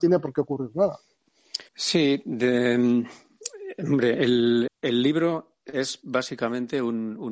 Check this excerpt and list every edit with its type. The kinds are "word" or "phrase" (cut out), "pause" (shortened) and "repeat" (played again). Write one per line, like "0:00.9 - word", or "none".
0:01.7 - pause
0:04.7 - word